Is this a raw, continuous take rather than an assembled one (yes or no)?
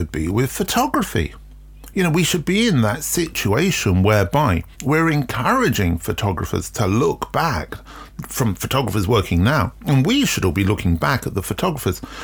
no